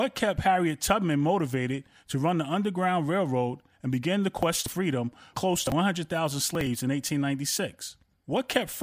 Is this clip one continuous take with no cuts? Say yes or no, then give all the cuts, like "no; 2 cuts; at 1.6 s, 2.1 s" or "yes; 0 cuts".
no; 1 cut; at 5.3 s